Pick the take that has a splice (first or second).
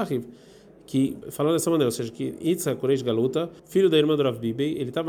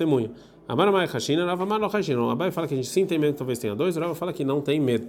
first